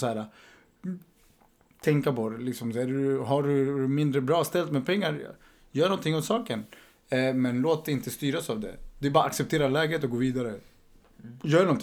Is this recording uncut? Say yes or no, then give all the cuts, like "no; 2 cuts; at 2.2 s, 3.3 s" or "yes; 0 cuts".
yes; 0 cuts